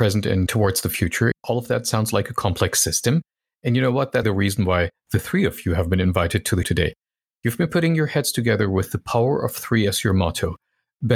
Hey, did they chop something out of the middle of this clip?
yes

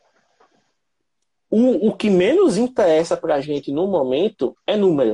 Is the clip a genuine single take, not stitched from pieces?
yes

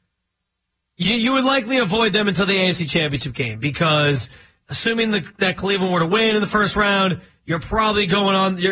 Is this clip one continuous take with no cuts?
yes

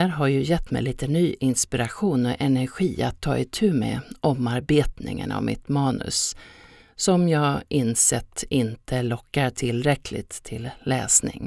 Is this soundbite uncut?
yes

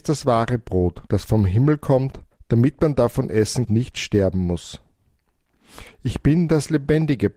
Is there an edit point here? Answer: yes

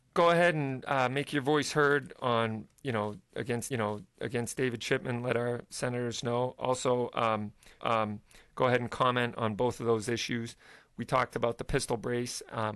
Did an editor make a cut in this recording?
yes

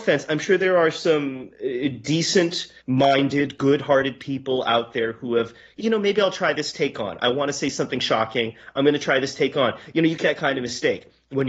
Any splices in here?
yes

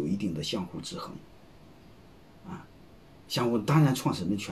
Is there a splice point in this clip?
no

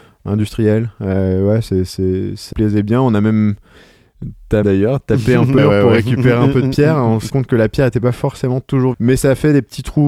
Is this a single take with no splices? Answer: no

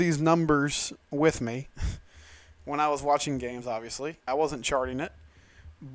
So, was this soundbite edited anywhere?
yes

